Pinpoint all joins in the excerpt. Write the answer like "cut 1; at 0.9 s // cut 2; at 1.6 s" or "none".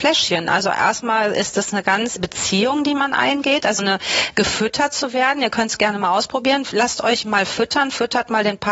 cut 1; at 2.2 s // cut 2; at 3.8 s